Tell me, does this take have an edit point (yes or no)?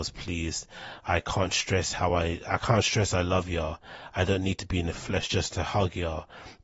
no